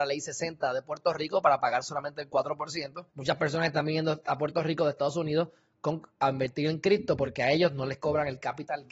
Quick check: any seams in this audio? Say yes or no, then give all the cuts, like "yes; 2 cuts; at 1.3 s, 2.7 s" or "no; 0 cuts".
yes; 1 cut; at 3.1 s